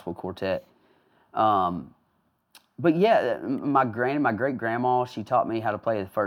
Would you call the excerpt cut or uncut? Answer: uncut